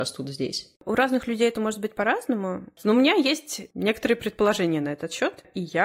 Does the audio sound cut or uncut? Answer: uncut